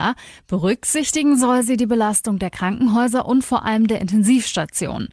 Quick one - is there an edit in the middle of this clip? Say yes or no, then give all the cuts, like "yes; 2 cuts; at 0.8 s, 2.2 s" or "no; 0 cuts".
no; 0 cuts